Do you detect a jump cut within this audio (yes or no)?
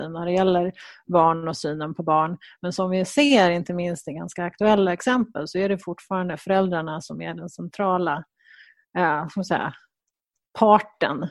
no